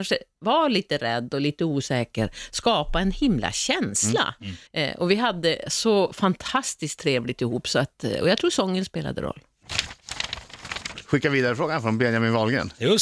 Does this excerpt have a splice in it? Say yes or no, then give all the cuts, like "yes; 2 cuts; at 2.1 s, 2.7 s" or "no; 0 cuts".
yes; 1 cut; at 4.7 s